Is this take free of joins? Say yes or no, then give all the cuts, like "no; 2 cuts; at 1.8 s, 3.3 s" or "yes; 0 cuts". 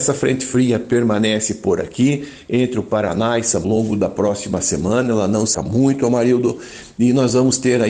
no; 2 cuts; at 3.6 s, 5.5 s